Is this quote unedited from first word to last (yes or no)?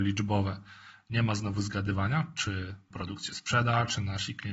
no